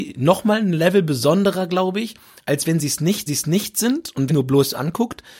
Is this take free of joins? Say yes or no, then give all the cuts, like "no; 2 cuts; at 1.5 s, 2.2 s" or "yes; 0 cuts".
no; 2 cuts; at 3.3 s, 4.3 s